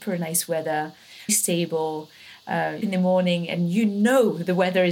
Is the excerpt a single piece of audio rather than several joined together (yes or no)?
no